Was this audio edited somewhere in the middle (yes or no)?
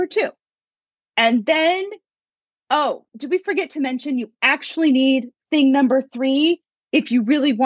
yes